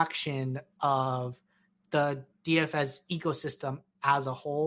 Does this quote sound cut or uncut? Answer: uncut